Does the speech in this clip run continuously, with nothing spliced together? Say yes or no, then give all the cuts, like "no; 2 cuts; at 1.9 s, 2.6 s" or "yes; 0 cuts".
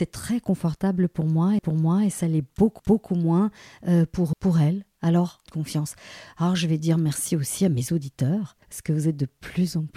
no; 5 cuts; at 1.6 s, 2.8 s, 4.3 s, 5.5 s, 8.6 s